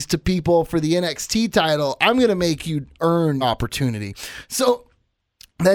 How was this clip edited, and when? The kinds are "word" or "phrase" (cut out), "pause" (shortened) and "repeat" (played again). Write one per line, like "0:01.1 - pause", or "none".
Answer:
0:03.4 - word